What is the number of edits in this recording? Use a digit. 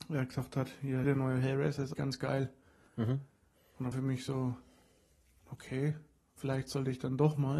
4